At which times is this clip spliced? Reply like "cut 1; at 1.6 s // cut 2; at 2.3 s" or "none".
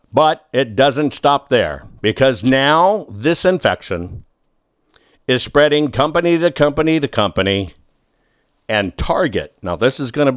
none